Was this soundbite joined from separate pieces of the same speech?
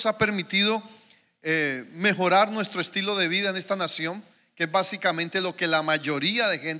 no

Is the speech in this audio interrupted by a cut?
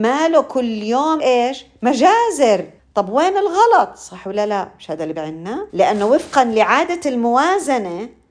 yes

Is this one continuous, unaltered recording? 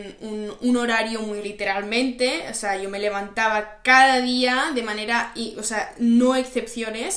no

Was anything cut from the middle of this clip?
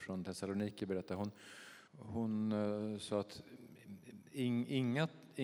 yes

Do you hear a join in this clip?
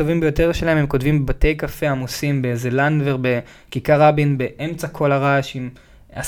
no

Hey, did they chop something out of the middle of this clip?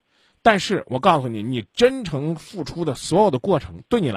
no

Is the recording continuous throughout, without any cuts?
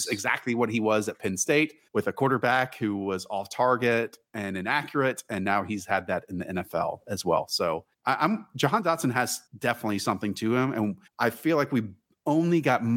no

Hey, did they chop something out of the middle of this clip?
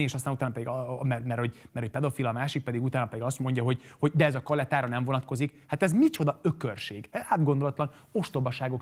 no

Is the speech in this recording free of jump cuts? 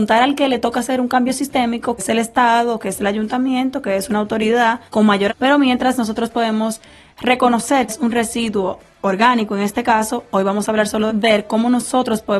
no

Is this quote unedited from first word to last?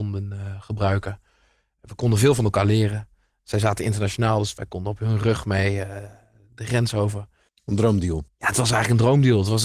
yes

